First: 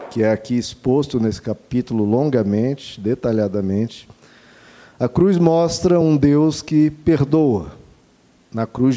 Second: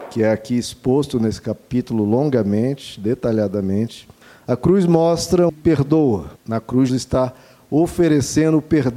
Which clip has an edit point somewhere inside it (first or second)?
second